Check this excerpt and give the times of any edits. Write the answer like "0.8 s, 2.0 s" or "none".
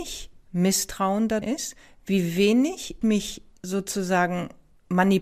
1.4 s, 3.0 s